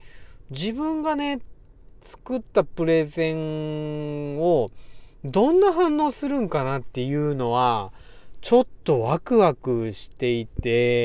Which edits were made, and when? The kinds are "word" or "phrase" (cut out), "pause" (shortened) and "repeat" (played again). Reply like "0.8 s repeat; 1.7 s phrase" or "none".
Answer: 2.0 s pause